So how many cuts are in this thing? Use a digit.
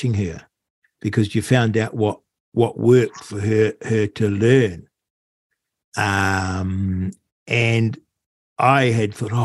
0